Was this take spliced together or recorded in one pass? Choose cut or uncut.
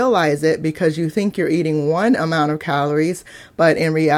uncut